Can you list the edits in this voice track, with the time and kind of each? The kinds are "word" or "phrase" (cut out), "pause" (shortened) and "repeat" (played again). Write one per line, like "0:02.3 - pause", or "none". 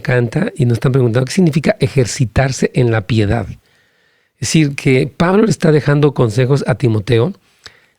none